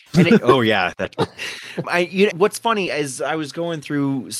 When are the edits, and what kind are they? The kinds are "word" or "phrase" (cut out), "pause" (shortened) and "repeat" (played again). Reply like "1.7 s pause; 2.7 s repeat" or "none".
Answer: 1.1 s word; 1.8 s word; 2.3 s word